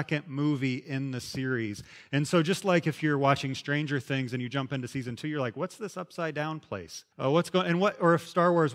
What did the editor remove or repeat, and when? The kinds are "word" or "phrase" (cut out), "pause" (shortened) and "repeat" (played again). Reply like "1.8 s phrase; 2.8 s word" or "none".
7.1 s pause